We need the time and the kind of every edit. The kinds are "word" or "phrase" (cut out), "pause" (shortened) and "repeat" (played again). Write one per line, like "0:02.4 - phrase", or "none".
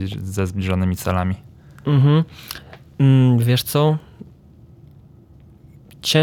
none